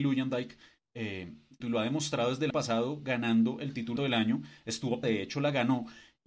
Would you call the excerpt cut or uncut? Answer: cut